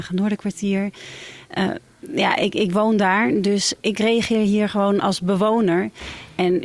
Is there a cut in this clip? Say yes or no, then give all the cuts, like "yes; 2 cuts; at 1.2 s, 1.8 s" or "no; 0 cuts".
no; 0 cuts